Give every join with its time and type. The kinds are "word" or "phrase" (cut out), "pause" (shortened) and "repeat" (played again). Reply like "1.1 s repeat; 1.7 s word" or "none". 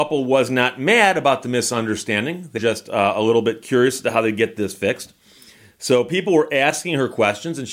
2.6 s word